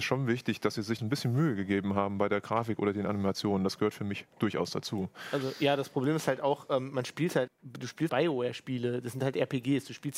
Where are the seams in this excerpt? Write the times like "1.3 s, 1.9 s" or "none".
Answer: 1.0 s, 7.5 s, 8.1 s